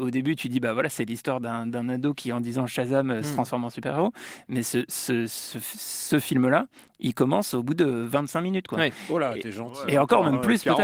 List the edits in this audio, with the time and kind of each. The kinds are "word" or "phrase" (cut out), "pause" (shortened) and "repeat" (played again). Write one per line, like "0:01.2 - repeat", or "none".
none